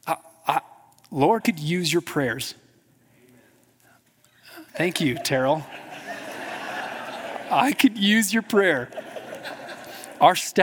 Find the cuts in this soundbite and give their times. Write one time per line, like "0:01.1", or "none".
0:01.4
0:04.7